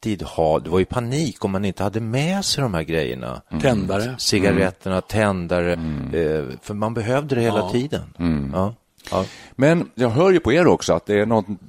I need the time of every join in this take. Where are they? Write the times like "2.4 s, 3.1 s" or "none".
none